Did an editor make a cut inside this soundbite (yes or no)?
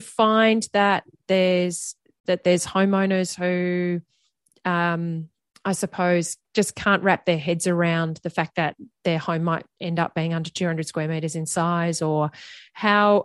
no